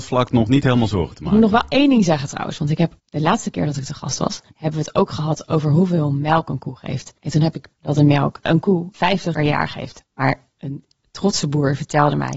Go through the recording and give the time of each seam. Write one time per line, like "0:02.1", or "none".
0:03.0
0:04.5
0:07.2
0:07.7
0:08.5
0:09.3